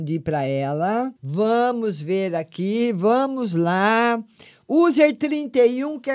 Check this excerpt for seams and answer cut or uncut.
cut